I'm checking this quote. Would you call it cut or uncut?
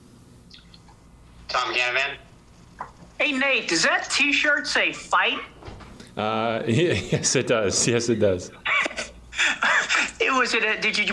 cut